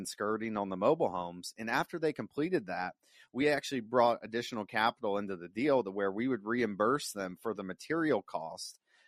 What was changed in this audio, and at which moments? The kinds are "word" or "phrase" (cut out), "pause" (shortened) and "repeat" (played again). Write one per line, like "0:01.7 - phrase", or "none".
none